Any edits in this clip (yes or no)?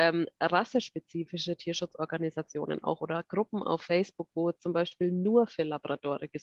no